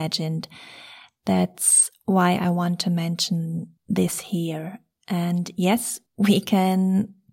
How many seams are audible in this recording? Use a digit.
2